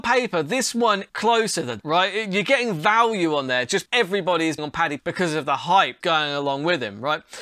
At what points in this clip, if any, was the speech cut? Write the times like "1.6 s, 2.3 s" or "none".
1.1 s, 1.8 s, 3.9 s, 4.6 s, 5.0 s, 6.0 s